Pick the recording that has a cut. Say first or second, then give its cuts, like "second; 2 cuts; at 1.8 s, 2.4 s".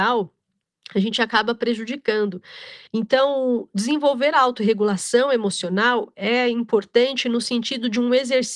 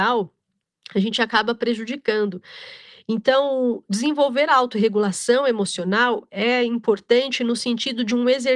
first; 1 cut; at 2.9 s